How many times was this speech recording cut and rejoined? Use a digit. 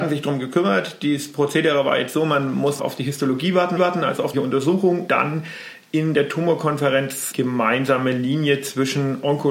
5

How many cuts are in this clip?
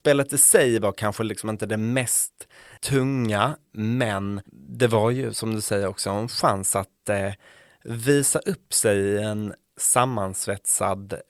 1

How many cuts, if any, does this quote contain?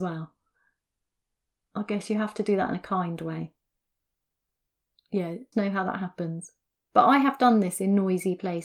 1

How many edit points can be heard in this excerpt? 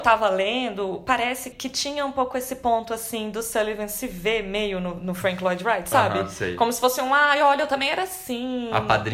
1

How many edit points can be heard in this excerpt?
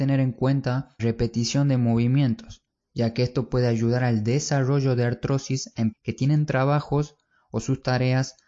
2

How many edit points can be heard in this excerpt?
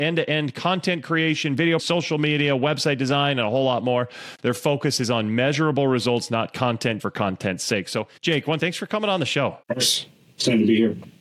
5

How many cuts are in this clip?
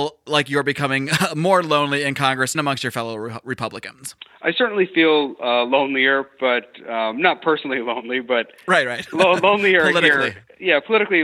1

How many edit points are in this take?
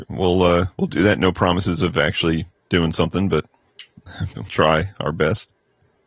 2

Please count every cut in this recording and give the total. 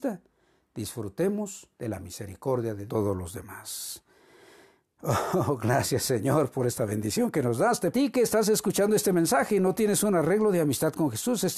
3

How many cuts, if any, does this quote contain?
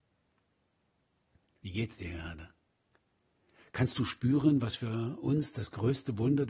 0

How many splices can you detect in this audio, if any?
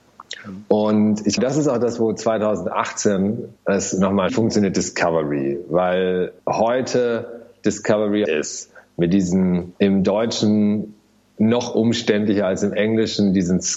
6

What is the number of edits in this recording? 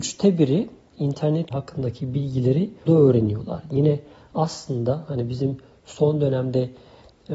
2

